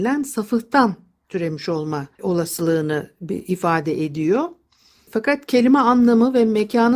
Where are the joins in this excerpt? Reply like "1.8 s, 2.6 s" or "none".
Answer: none